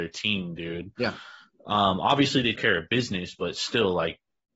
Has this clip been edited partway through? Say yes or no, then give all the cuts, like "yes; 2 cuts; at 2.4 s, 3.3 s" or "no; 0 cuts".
yes; 1 cut; at 2.6 s